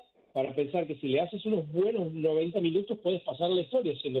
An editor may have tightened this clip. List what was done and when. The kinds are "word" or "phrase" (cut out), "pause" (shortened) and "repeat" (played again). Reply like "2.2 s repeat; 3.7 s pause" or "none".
none